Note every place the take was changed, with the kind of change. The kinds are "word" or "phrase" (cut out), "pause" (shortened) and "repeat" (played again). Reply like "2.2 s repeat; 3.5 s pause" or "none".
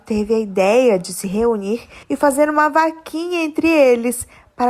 2.0 s pause